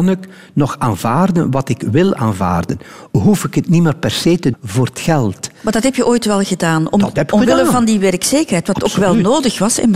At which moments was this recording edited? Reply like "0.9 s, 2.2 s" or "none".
4.5 s